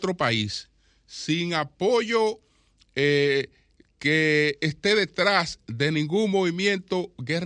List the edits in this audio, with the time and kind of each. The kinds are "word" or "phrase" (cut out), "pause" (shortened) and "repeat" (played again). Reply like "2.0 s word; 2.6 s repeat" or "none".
none